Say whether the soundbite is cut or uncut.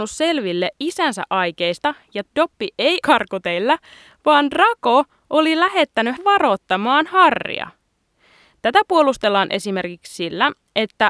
cut